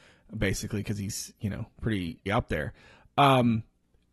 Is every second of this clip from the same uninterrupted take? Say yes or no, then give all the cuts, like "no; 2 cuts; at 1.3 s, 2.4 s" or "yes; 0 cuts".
no; 1 cut; at 2.3 s